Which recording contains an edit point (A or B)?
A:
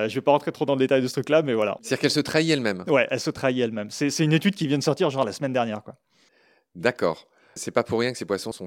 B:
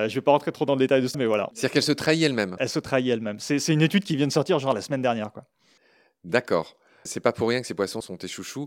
B